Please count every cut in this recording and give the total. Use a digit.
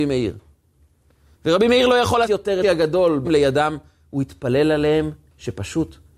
3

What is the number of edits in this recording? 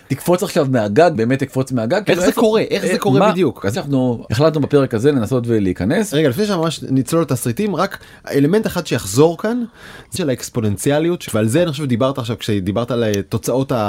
4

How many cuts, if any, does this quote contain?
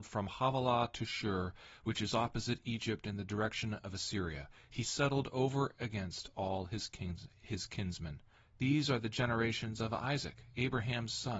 0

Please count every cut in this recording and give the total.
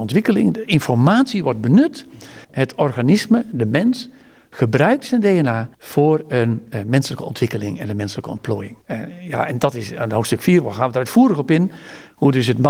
3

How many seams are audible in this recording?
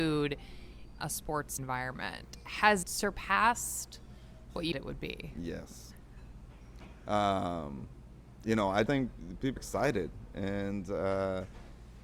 6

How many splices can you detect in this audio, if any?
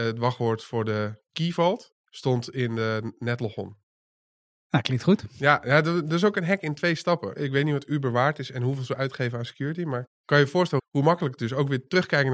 2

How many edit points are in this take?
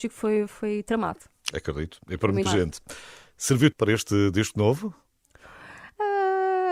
2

